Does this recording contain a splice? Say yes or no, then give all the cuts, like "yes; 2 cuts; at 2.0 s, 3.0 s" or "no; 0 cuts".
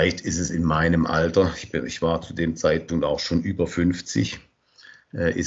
no; 0 cuts